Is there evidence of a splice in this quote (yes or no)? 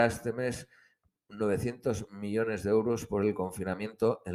no